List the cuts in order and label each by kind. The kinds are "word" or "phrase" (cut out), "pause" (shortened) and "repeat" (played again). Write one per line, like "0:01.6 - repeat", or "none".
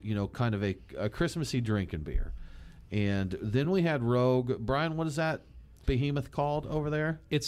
none